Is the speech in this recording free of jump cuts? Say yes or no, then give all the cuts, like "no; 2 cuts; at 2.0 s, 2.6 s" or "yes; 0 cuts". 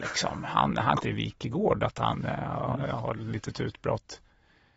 no; 1 cut; at 1.0 s